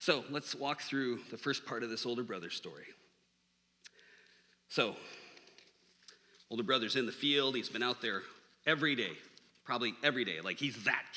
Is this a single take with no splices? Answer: yes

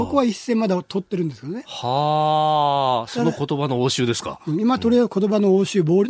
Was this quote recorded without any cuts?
yes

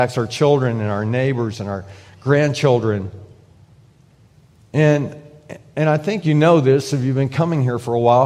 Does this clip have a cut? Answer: no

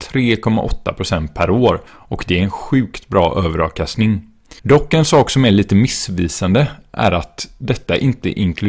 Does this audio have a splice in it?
yes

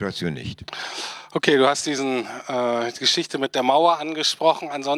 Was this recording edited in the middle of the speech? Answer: no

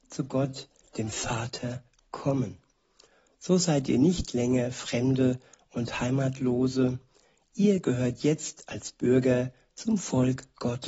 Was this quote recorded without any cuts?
yes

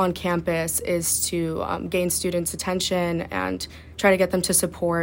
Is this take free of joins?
yes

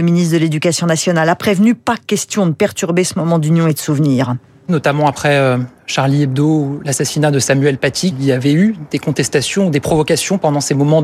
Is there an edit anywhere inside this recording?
no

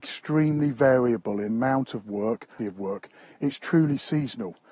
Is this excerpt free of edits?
no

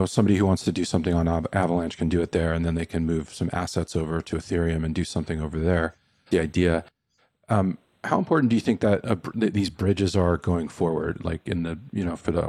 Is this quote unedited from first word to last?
no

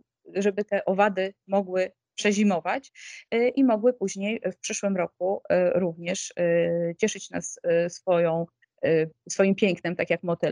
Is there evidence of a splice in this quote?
no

